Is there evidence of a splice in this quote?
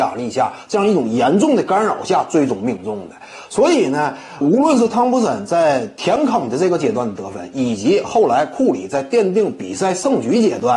yes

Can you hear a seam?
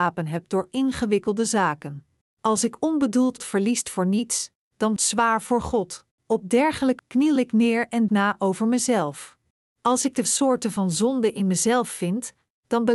yes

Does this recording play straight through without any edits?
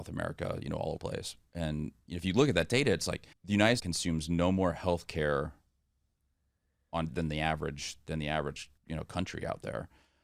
no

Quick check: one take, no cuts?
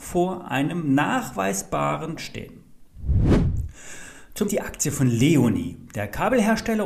no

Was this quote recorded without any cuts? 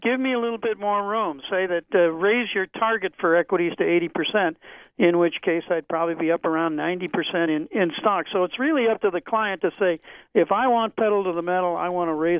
yes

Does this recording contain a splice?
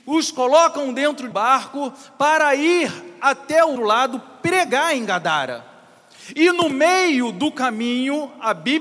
yes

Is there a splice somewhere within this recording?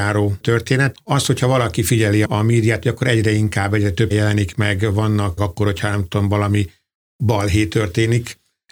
yes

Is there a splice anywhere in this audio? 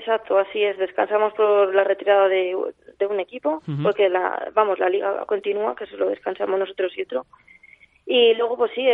no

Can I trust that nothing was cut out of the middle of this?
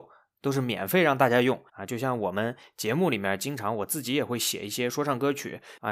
no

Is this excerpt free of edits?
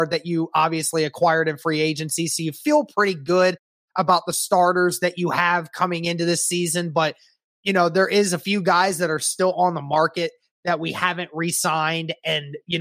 yes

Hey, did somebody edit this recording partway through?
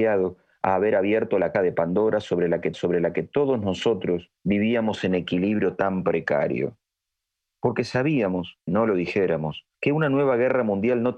yes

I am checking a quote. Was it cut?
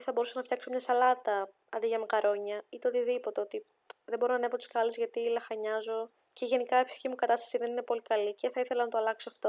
yes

